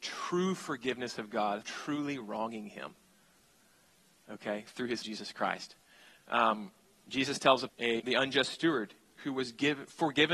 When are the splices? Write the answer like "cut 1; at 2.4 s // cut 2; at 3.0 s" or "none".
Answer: cut 1; at 1.6 s // cut 2; at 5.0 s // cut 3; at 7.7 s // cut 4; at 8.0 s